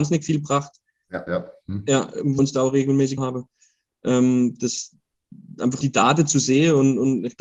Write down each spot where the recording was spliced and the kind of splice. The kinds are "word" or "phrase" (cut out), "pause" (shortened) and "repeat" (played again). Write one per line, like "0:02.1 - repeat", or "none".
0:01.3 - word
0:02.4 - word
0:03.2 - word
0:05.8 - word